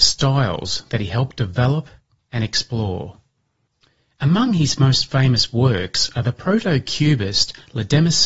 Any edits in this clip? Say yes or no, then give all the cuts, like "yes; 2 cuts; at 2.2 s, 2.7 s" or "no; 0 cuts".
no; 0 cuts